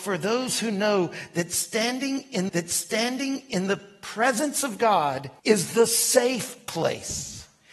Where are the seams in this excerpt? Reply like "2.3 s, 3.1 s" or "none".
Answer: 2.5 s, 5.4 s